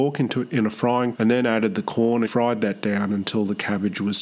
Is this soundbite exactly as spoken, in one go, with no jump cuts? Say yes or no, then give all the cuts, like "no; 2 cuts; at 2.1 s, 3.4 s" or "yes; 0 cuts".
no; 2 cuts; at 1.1 s, 2.3 s